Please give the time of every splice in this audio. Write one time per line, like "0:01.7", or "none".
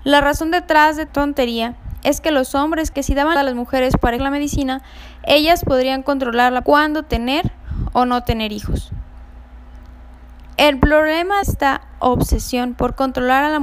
0:01.1
0:02.9
0:03.4
0:04.2
0:06.6
0:11.4